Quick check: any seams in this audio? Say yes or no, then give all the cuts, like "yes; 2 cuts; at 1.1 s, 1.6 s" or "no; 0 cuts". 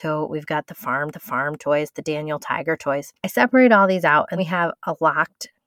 yes; 3 cuts; at 1.1 s, 3.2 s, 4.4 s